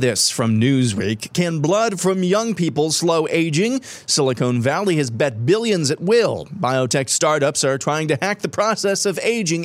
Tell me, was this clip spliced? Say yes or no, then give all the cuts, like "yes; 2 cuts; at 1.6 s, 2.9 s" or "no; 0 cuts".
no; 0 cuts